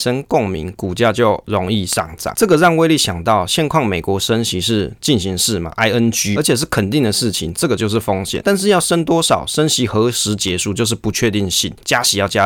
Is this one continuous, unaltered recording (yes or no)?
no